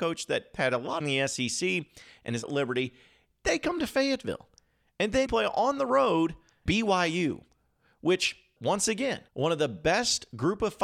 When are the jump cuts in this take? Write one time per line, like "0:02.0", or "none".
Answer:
0:01.0
0:02.4
0:05.3
0:06.7
0:08.6
0:09.3